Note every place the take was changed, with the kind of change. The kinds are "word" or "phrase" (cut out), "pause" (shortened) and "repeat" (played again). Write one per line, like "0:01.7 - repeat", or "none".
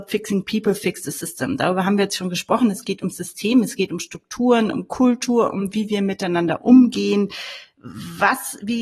none